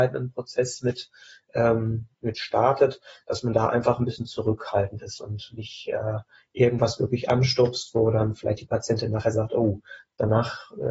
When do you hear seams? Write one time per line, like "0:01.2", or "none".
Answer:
none